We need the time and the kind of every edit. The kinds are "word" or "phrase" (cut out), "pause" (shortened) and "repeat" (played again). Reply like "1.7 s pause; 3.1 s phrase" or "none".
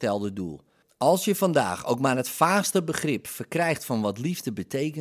none